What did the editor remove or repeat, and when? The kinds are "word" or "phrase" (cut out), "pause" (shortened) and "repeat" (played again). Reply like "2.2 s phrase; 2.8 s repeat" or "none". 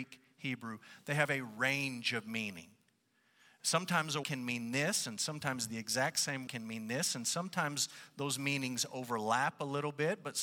4.2 s word; 6.5 s word